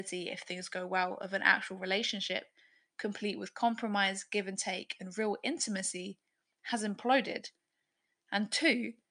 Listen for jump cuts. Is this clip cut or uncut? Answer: uncut